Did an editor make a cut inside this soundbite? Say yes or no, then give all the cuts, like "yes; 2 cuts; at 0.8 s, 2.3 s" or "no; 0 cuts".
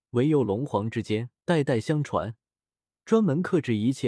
yes; 1 cut; at 1.4 s